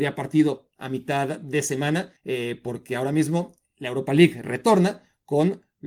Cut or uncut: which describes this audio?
cut